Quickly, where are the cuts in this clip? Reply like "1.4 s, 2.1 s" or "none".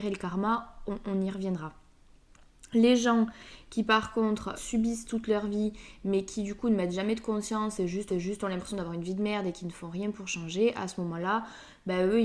4.5 s, 8.1 s

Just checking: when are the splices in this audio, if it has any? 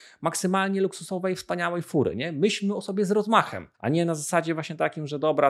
3.7 s

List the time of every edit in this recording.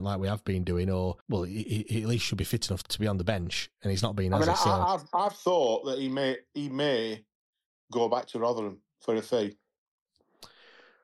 1.2 s, 2.8 s, 8.9 s

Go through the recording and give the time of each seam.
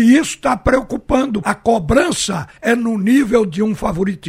1.4 s, 2.6 s

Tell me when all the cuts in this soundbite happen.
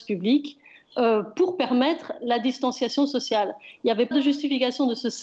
4.1 s

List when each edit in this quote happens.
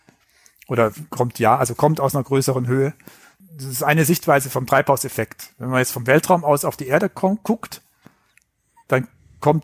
none

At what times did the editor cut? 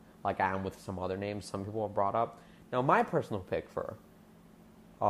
none

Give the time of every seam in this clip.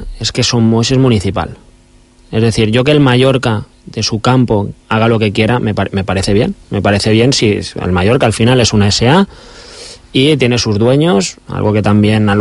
4.8 s, 6.6 s

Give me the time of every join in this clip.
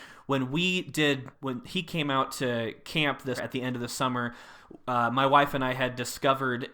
1.3 s, 3.4 s

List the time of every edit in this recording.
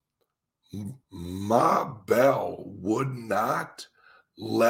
1.0 s

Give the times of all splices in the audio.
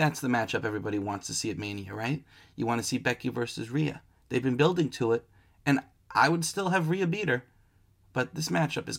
none

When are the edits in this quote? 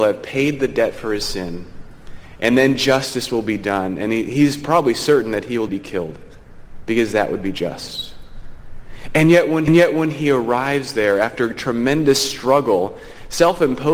5.7 s, 9.7 s

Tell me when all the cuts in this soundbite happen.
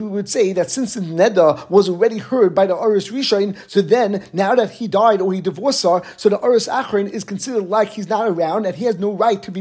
none

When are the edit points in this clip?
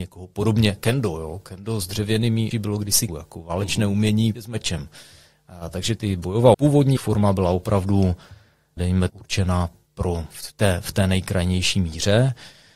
2.5 s, 3.1 s, 4.3 s, 6.0 s, 6.5 s, 7.0 s, 8.8 s, 9.1 s, 10.3 s

